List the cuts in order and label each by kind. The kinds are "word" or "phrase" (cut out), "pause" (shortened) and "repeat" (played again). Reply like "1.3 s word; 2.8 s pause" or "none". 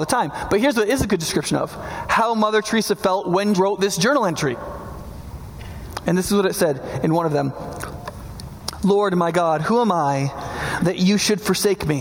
3.5 s word

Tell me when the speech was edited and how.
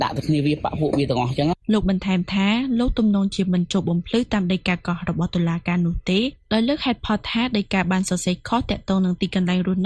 1.6 s pause

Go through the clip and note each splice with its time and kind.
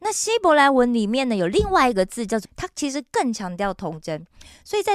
2.4 s word

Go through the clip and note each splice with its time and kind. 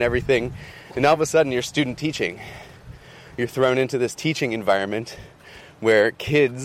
none

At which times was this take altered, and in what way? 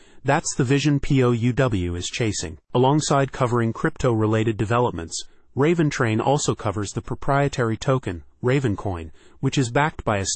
none

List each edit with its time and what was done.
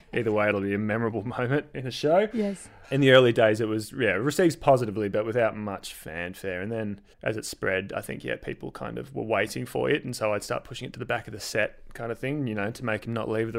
7.1 s pause

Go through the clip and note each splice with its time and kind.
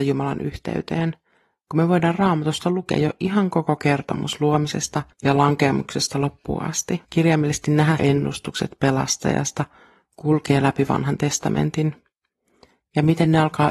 5.1 s pause; 7.0 s pause; 8.0 s phrase

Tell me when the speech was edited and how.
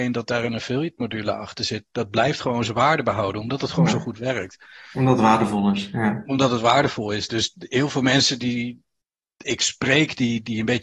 none

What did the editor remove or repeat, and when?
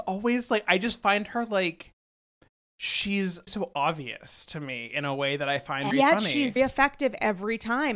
3.5 s word; 5.9 s word; 6.6 s word

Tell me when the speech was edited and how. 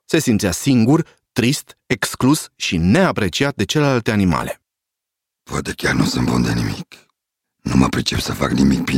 none

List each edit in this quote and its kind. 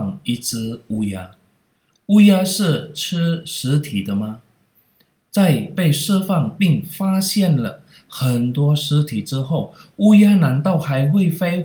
none

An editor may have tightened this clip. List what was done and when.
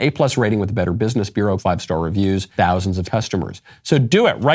1.6 s word; 2.6 s word; 3.0 s word

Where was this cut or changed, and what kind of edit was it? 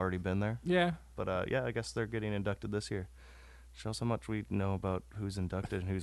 none

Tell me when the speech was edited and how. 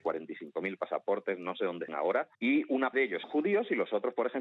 1.9 s word; 2.3 s pause; 2.9 s word; 3.2 s word

